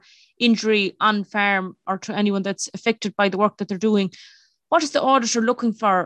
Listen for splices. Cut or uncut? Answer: uncut